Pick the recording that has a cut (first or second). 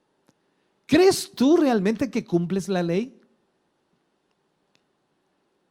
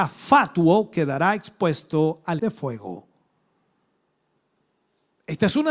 second